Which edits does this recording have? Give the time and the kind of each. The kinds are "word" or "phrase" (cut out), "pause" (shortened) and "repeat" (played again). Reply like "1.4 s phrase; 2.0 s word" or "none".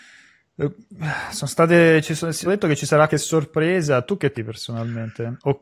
2.5 s word; 3.1 s word; 4.3 s word